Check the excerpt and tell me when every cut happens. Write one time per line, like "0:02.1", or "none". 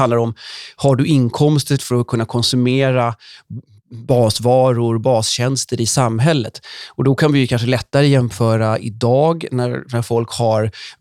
0:01.8